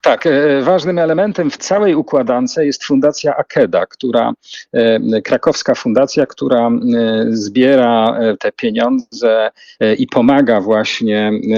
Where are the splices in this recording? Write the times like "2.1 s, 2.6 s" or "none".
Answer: 1.6 s